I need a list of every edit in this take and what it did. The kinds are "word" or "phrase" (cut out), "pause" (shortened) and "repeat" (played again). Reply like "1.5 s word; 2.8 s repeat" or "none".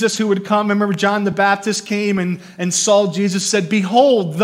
none